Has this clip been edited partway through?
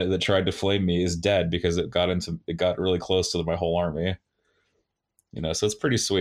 no; 0 cuts

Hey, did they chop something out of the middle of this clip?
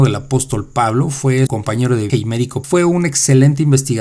yes; 3 cuts; at 1.5 s, 2.1 s, 2.6 s

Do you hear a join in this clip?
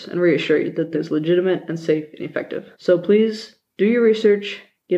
yes; 2 cuts; at 0.9 s, 2.7 s

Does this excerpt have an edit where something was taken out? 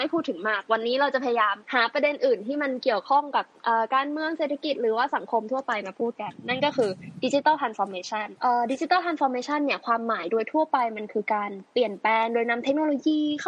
yes; 1 cut; at 1.6 s

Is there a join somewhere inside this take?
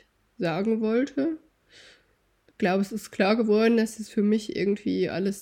no; 0 cuts

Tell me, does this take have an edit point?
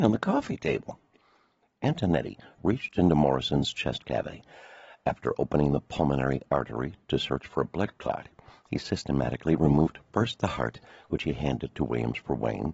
no; 0 cuts

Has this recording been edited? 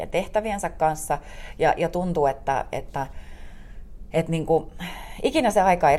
no; 0 cuts

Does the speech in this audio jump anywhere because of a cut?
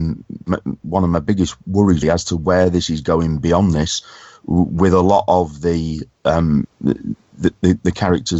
yes; 1 cut; at 2.0 s

